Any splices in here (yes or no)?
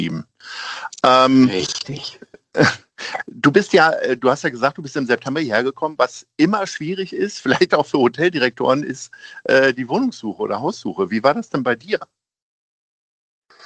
no